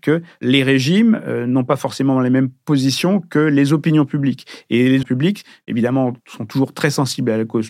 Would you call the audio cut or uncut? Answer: cut